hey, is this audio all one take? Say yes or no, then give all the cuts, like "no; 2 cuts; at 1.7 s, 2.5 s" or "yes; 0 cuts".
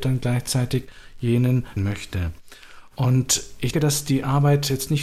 no; 2 cuts; at 1.8 s, 3.7 s